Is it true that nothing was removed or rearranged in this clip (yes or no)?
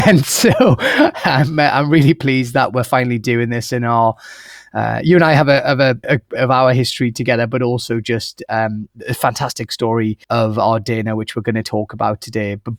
no